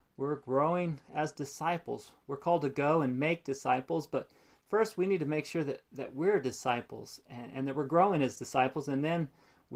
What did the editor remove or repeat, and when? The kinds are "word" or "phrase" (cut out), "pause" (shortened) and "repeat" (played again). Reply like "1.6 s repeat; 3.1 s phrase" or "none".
none